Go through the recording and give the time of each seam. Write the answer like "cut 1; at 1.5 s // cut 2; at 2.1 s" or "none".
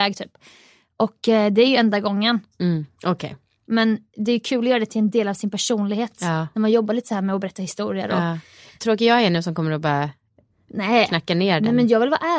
none